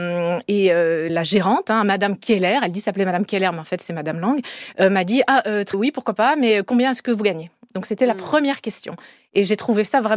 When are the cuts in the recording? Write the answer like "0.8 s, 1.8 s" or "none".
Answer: 1.1 s, 5.7 s